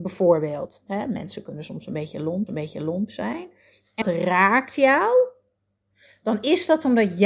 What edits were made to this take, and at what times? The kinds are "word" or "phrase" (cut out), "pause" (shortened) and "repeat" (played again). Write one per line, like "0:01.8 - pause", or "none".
0:02.5 - repeat
0:04.0 - word